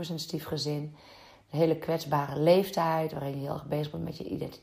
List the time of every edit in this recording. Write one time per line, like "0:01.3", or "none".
none